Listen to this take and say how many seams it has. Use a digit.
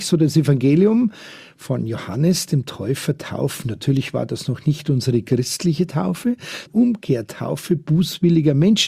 1